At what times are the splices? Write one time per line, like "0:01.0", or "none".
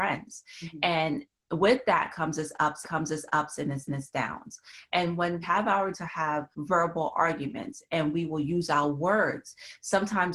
0:02.8
0:03.9
0:05.4
0:05.9
0:06.5